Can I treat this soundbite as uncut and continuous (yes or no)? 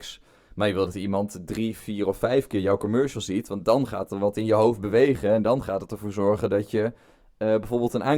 yes